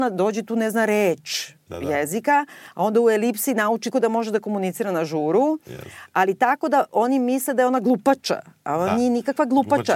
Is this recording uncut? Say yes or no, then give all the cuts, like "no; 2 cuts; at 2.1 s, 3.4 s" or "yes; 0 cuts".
no; 1 cut; at 3.9 s